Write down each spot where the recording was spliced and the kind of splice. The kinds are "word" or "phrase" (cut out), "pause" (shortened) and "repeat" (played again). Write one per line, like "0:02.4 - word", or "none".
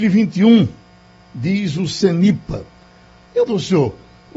0:03.5 - word